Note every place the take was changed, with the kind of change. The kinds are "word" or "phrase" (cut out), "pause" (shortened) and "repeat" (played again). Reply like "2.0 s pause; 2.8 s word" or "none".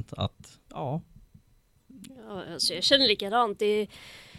none

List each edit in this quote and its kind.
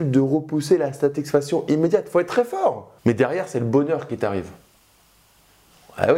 3.0 s pause

